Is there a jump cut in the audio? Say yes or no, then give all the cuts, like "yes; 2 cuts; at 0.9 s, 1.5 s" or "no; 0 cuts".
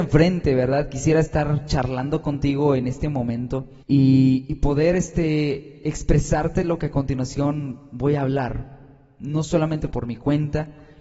yes; 2 cuts; at 3.8 s, 9.9 s